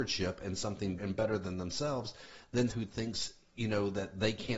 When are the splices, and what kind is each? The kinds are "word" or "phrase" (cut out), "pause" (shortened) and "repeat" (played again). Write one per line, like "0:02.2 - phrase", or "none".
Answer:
0:01.0 - word
0:02.7 - word